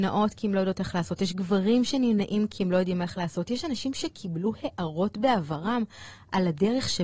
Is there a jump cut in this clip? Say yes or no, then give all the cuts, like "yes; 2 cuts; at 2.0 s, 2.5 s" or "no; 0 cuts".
no; 0 cuts